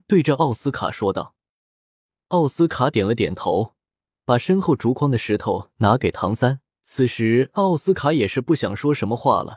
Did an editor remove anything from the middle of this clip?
yes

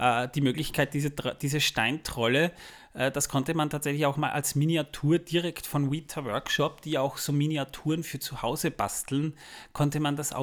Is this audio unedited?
yes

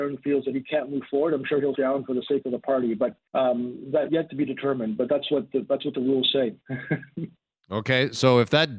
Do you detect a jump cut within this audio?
yes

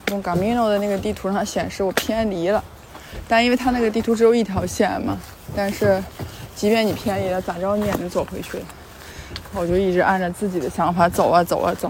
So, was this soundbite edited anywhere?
no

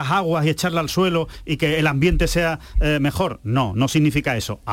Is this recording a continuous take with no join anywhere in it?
yes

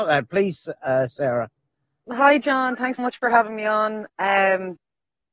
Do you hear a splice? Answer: yes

